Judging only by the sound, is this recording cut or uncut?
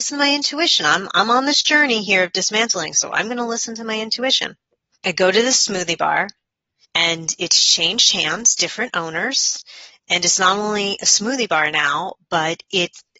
uncut